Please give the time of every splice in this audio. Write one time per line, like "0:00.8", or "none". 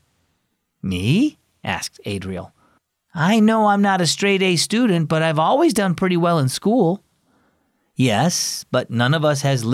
0:02.8